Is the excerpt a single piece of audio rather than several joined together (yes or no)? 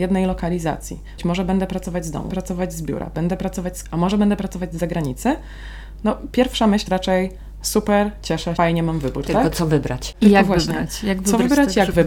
no